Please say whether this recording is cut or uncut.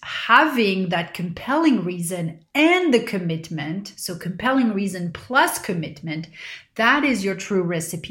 uncut